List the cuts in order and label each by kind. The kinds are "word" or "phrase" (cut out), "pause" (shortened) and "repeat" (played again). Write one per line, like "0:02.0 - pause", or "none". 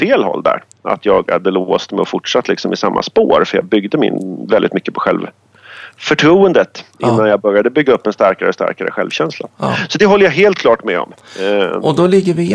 none

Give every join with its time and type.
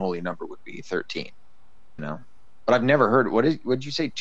0:02.0 - word

